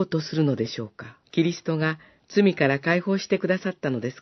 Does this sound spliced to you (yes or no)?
yes